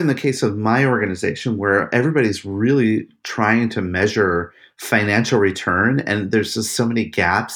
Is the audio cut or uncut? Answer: uncut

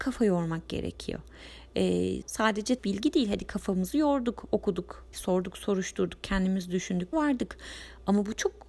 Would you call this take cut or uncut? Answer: cut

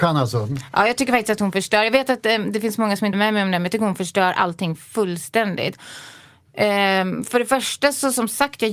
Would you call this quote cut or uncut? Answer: cut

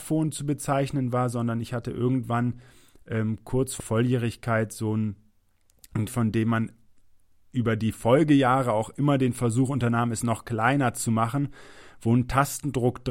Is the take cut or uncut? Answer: cut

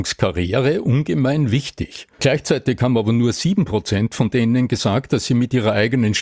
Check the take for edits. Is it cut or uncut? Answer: cut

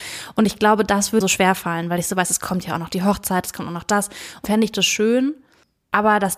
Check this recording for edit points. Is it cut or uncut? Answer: cut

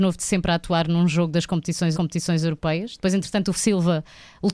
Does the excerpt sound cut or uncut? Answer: cut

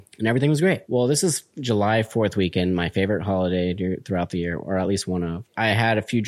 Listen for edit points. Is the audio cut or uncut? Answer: uncut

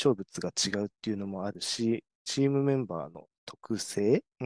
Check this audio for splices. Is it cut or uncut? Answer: uncut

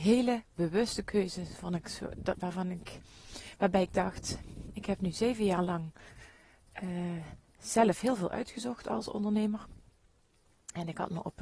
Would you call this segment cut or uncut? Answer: uncut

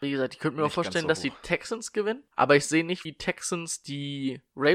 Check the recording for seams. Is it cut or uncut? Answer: cut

